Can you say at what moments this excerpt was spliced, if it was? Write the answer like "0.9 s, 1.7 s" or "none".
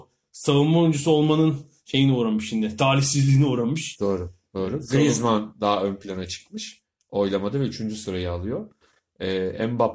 none